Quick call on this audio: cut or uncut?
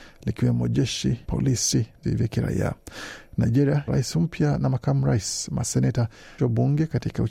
cut